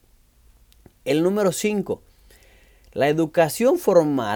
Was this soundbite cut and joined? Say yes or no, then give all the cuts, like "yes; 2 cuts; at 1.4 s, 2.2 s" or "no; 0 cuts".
no; 0 cuts